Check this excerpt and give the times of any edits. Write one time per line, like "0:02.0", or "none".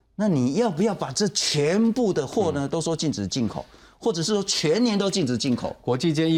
none